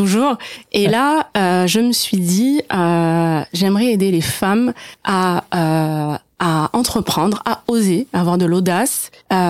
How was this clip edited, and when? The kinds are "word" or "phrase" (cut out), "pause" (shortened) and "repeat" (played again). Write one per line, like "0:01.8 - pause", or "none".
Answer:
none